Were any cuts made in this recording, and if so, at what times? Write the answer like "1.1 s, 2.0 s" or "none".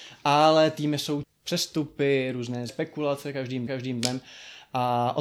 1.2 s, 2.7 s, 3.7 s